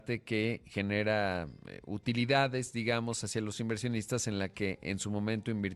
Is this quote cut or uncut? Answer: uncut